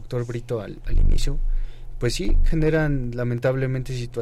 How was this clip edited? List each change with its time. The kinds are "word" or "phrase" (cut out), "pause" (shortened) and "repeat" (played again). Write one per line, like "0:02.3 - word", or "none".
none